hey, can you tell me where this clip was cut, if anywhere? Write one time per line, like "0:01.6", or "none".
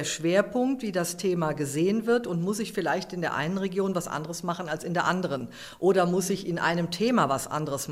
none